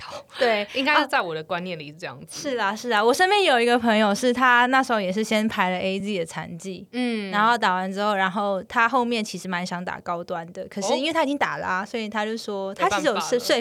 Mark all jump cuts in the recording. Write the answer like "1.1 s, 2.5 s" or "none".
none

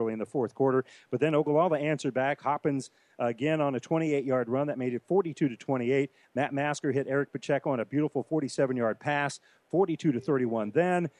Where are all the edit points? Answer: none

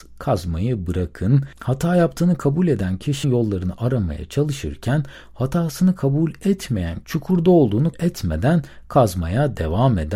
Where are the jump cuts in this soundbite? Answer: 3.2 s, 7.0 s, 7.9 s

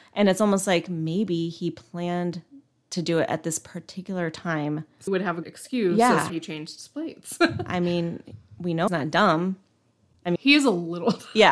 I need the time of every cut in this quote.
5.1 s, 5.4 s, 6.3 s, 8.9 s, 10.4 s

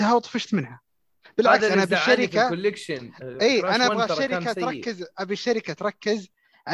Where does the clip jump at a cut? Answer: none

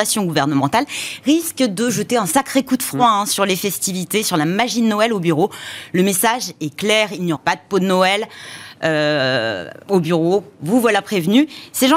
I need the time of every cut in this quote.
7.3 s

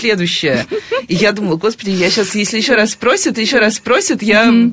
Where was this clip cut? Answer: 3.4 s

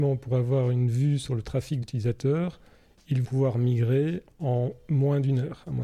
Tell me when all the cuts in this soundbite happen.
1.8 s, 3.2 s

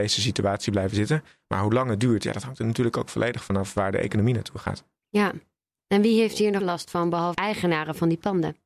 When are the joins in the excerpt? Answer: 6.6 s, 7.3 s

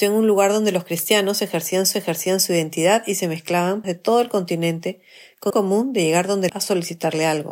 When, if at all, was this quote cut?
1.9 s, 3.8 s, 5.5 s, 6.5 s

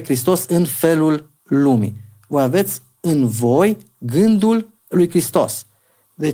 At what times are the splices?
1.4 s, 4.8 s

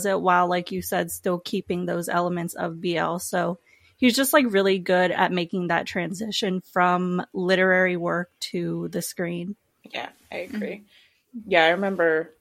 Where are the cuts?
none

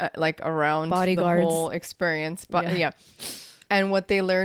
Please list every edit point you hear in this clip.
none

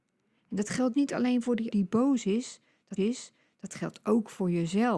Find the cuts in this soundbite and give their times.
0.9 s, 1.7 s, 3.0 s

